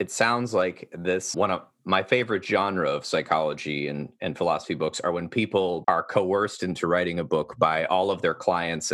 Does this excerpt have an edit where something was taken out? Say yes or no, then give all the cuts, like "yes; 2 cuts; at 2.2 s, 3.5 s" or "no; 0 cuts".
yes; 2 cuts; at 1.3 s, 5.8 s